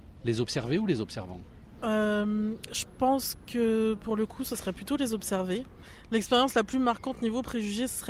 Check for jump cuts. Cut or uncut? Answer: uncut